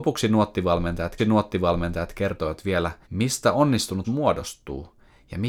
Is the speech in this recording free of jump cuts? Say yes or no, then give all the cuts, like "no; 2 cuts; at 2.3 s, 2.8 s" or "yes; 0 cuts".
no; 3 cuts; at 1.2 s, 3.0 s, 4.0 s